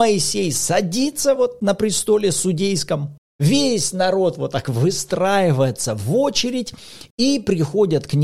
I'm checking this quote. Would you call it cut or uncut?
uncut